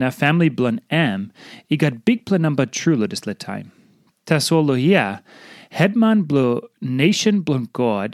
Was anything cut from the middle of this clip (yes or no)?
no